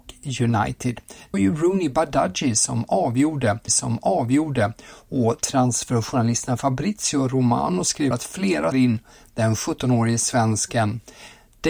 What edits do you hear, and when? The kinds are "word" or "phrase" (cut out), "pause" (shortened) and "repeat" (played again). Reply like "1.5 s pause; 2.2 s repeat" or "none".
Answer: 1.3 s word; 3.7 s repeat; 8.1 s word; 8.7 s phrase